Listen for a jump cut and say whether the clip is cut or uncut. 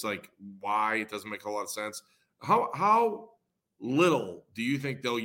uncut